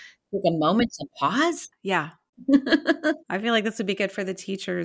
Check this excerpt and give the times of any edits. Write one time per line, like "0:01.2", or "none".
0:03.2